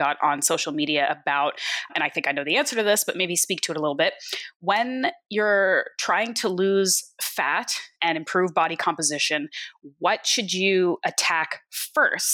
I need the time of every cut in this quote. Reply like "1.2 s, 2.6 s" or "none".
none